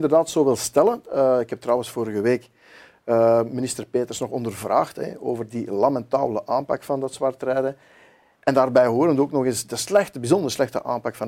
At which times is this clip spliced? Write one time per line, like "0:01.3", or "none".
none